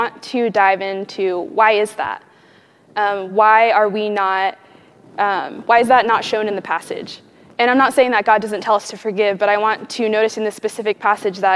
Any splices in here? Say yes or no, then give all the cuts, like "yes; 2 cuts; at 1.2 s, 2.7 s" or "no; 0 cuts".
no; 0 cuts